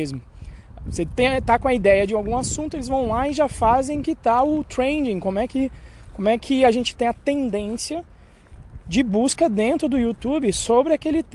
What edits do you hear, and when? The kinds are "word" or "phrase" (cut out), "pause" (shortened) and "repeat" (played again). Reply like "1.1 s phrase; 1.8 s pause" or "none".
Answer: 4.0 s word